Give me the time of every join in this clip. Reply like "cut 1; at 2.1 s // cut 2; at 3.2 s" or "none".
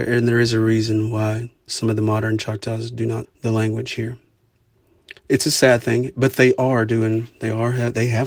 cut 1; at 1.7 s // cut 2; at 3.2 s // cut 3; at 5.2 s